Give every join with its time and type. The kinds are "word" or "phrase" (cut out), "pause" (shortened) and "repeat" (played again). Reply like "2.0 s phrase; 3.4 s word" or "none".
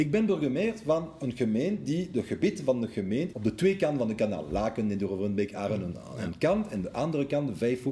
3.3 s word

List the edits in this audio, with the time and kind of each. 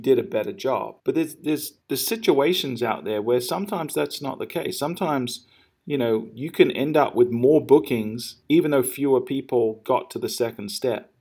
1.0 s pause; 1.8 s pause; 8.4 s pause

